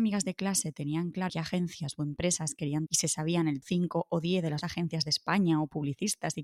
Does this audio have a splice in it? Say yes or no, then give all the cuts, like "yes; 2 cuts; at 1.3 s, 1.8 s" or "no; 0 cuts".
yes; 4 cuts; at 1.3 s, 2.9 s, 3.6 s, 4.6 s